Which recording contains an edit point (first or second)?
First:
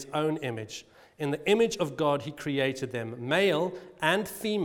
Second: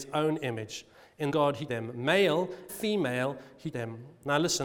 second